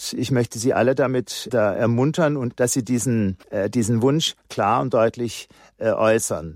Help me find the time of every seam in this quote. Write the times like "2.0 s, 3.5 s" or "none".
1.5 s, 2.5 s, 3.4 s